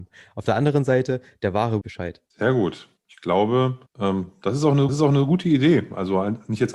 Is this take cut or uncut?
cut